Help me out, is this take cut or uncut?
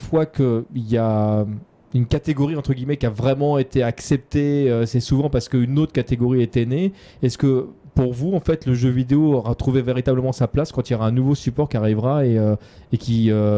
uncut